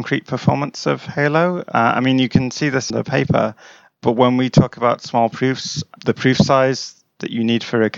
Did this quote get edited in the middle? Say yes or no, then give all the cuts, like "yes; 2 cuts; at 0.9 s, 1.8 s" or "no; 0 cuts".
yes; 1 cut; at 2.9 s